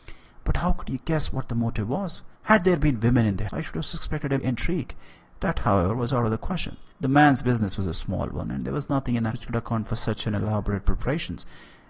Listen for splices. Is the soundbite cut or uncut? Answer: cut